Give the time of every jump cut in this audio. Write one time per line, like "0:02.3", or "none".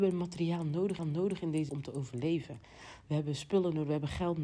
0:01.0
0:01.7